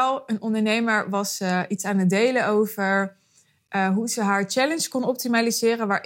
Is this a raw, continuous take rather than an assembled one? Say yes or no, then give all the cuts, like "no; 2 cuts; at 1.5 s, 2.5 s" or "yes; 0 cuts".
yes; 0 cuts